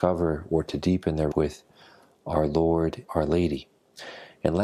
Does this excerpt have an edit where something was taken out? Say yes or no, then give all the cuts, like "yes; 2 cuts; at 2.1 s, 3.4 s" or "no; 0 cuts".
yes; 2 cuts; at 1.3 s, 3.1 s